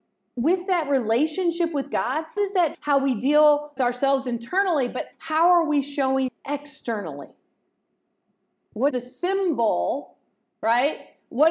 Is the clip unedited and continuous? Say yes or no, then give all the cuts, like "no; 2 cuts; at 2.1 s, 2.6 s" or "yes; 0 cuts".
no; 6 cuts; at 2.4 s, 2.7 s, 3.8 s, 5.1 s, 6.3 s, 8.9 s